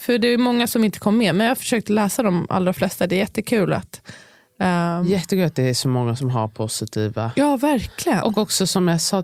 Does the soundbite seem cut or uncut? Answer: uncut